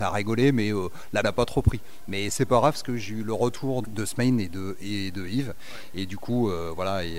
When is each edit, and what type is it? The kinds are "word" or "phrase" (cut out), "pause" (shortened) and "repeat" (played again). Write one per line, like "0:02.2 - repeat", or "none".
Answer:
0:01.2 - phrase
0:03.8 - word